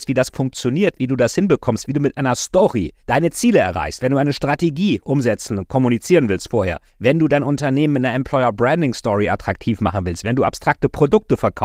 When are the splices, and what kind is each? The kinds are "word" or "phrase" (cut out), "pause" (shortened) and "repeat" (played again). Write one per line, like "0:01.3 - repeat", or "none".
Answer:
0:03.0 - pause
0:06.9 - pause